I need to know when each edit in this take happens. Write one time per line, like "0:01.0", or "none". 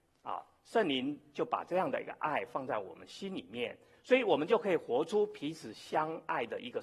none